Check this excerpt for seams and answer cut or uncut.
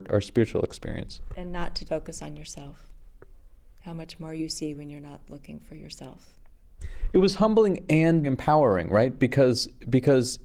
cut